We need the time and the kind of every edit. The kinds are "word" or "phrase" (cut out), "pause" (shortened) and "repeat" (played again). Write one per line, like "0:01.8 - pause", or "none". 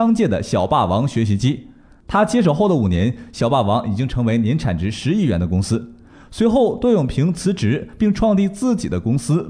none